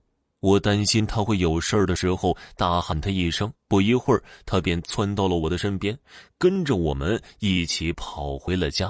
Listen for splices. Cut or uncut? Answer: cut